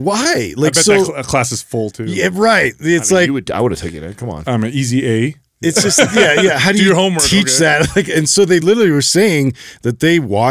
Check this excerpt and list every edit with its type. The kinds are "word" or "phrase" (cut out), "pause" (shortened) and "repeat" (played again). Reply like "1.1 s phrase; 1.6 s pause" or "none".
none